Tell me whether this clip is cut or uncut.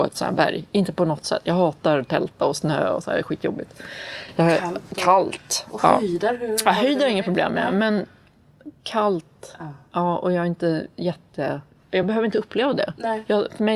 uncut